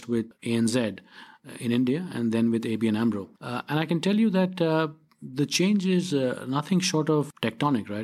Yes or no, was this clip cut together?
no